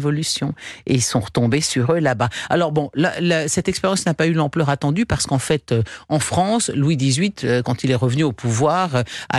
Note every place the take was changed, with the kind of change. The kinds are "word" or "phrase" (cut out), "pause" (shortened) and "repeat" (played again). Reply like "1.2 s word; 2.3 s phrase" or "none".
none